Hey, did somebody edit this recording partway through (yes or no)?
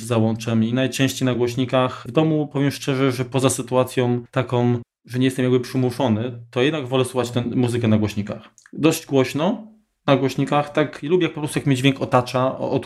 no